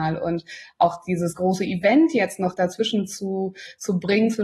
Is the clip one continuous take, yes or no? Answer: yes